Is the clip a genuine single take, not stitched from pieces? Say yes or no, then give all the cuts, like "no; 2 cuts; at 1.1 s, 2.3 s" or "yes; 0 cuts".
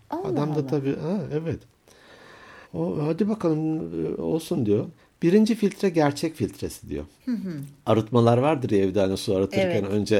no; 3 cuts; at 2.6 s, 5.0 s, 7.2 s